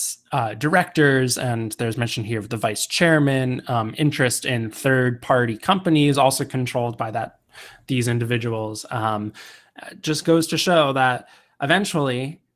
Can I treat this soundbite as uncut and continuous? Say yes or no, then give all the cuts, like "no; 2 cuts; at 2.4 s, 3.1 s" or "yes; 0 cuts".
yes; 0 cuts